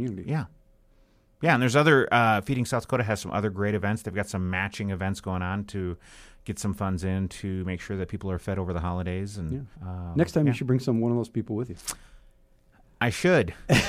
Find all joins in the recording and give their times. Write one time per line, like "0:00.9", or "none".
0:09.7